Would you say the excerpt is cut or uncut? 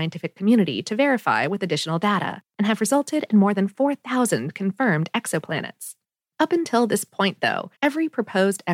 cut